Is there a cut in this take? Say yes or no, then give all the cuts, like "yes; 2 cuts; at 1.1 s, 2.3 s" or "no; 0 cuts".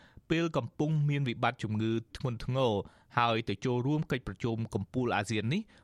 yes; 1 cut; at 2.1 s